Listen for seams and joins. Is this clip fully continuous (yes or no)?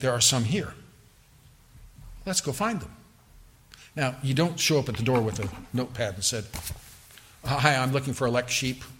yes